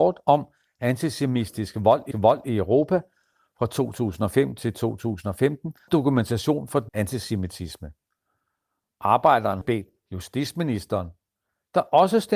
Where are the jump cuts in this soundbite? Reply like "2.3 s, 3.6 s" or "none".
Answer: 2.1 s, 5.9 s, 6.9 s, 9.6 s